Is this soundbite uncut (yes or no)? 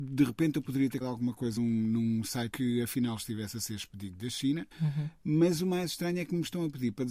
no